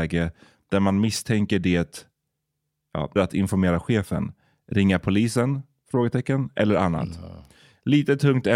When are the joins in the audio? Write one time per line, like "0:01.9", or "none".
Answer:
0:03.2